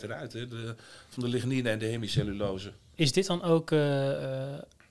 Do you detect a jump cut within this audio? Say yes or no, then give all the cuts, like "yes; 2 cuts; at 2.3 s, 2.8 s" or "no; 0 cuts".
no; 0 cuts